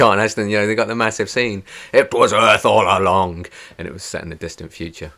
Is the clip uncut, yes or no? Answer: yes